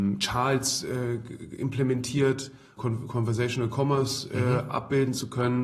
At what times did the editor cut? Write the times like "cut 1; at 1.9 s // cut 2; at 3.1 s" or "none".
cut 1; at 2.8 s